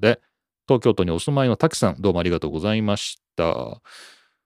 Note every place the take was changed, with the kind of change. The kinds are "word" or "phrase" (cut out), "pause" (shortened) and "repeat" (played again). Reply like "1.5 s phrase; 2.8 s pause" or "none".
none